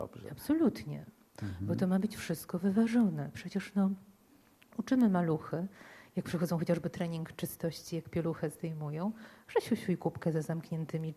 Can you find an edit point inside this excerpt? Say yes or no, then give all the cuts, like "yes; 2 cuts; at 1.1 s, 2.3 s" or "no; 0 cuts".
no; 0 cuts